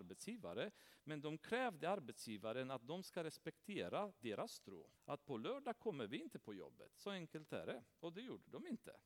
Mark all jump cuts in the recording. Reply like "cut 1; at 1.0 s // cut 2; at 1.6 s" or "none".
cut 1; at 5.0 s

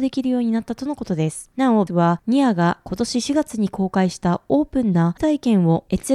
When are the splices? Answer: cut 1; at 1.9 s // cut 2; at 5.2 s

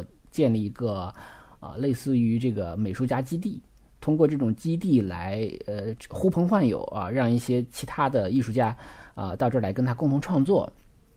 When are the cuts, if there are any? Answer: none

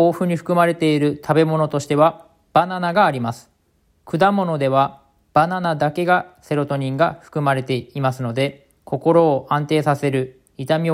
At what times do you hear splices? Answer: cut 1; at 8.8 s

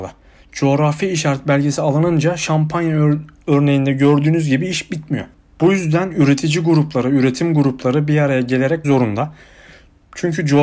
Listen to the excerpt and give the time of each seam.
cut 1; at 8.8 s

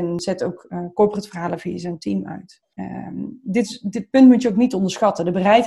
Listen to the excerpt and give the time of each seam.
cut 1; at 2.7 s

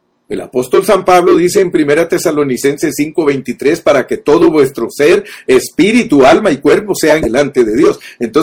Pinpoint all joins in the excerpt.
cut 1; at 7.2 s

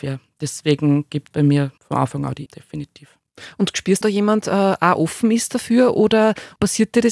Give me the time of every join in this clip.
cut 1; at 1.3 s // cut 2; at 1.8 s // cut 3; at 2.5 s // cut 4; at 4.0 s

